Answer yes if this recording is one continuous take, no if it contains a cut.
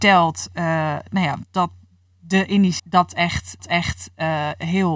no